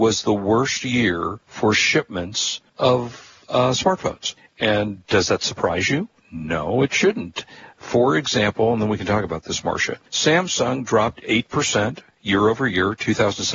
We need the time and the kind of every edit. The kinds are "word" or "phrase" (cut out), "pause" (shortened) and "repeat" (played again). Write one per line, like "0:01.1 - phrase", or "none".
0:01.4 - pause
0:02.7 - pause
0:04.4 - pause
0:10.1 - pause